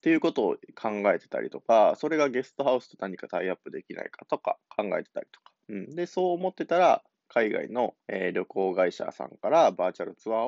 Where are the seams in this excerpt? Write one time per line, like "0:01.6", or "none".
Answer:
0:05.6
0:08.0